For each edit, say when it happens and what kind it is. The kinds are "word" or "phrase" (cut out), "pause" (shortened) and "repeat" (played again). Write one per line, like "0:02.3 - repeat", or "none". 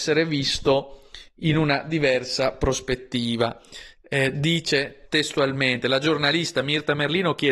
none